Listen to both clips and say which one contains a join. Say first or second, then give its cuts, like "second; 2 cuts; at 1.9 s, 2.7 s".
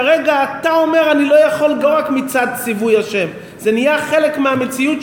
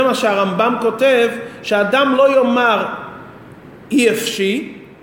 first; 1 cut; at 1.8 s